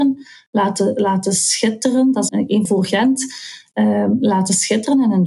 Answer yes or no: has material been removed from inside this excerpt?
yes